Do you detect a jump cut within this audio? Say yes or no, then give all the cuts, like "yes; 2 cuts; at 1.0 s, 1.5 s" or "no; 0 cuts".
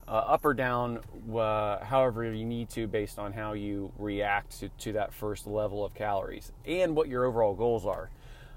no; 0 cuts